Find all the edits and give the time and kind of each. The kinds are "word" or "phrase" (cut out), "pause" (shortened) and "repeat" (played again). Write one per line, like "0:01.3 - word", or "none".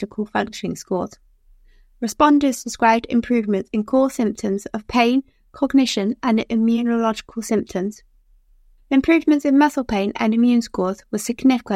none